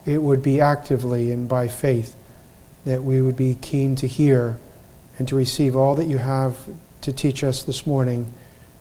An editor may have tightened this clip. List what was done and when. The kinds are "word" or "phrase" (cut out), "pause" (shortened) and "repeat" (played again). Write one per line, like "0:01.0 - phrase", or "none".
none